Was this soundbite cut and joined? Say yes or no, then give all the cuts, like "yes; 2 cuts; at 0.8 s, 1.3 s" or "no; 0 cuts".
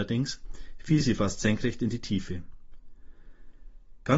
no; 0 cuts